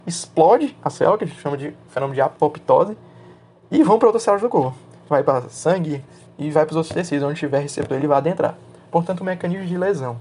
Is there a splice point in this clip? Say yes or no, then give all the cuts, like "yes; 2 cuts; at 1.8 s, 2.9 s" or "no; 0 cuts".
no; 0 cuts